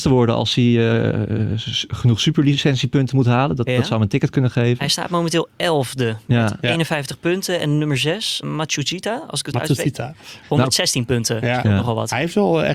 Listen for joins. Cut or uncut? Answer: cut